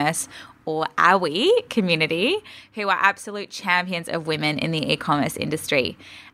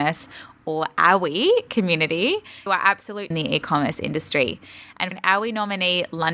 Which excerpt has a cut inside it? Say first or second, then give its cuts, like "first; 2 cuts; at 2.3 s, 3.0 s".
second; 3 cuts; at 2.7 s, 3.3 s, 5.1 s